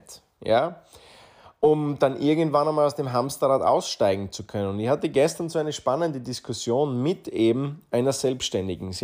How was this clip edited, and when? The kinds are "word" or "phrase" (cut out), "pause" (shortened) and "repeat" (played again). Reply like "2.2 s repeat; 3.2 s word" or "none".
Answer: none